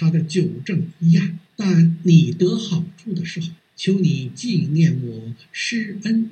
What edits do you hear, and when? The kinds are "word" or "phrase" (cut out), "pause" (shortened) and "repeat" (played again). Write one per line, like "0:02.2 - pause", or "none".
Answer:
0:01.5 - pause
0:03.6 - pause